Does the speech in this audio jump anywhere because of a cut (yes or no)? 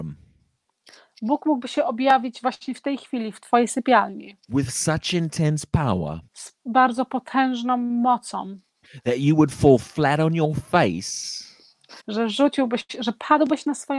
yes